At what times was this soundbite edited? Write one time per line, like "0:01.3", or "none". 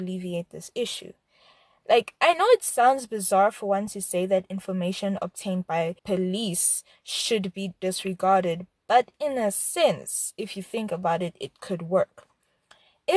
0:06.0